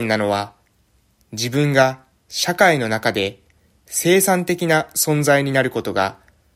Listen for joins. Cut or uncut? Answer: uncut